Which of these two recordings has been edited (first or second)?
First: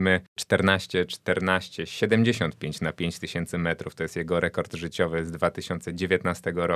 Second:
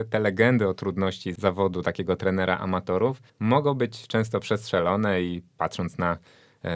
second